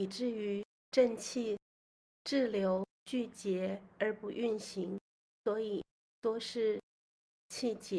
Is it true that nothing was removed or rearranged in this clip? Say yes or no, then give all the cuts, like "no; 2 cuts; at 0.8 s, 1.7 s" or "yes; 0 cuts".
no; 2 cuts; at 2.9 s, 5.9 s